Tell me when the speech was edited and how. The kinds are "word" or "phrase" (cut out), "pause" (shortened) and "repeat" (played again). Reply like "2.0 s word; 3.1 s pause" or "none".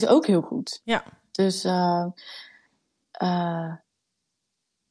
none